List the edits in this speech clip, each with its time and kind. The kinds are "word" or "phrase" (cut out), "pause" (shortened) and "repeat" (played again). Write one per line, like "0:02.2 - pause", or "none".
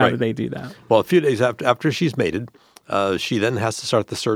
none